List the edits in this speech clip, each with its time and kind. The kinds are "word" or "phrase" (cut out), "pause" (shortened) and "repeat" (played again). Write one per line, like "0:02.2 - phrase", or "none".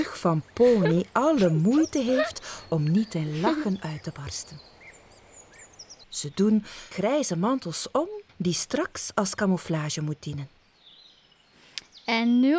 0:06.0 - pause
0:06.9 - word
0:08.3 - pause